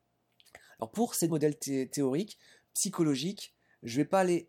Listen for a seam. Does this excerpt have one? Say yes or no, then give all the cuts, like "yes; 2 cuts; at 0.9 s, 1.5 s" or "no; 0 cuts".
yes; 1 cut; at 1.3 s